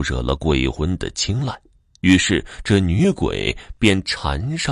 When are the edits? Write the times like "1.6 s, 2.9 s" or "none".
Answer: none